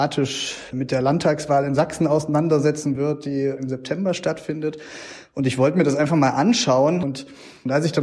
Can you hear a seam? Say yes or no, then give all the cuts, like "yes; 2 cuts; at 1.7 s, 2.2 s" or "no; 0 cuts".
no; 0 cuts